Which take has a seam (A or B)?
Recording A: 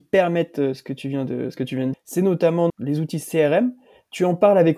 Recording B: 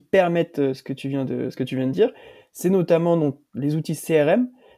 A